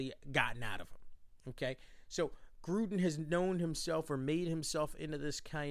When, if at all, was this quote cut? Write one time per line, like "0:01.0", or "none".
none